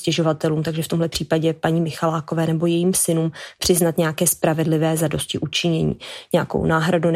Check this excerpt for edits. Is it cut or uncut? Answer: uncut